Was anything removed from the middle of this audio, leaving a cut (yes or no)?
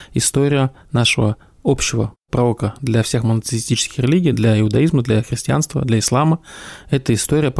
no